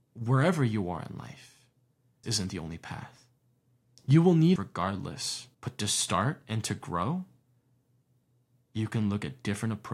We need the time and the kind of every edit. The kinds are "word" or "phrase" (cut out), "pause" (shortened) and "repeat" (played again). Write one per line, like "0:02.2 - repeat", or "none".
0:02.2 - word
0:04.6 - word
0:05.5 - pause